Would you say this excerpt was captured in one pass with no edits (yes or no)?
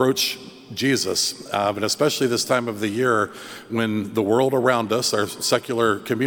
yes